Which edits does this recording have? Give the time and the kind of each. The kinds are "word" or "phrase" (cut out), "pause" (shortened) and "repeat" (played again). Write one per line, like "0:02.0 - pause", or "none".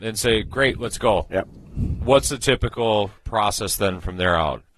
0:03.2 - pause